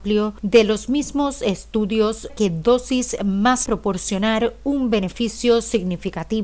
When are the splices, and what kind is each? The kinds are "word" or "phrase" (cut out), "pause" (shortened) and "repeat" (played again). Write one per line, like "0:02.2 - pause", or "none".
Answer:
0:02.3 - word
0:03.7 - phrase